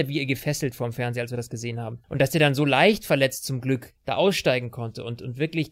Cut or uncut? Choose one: cut